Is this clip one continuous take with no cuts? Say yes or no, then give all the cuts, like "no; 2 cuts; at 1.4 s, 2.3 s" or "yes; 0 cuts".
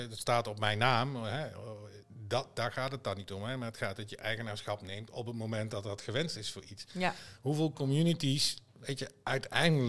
yes; 0 cuts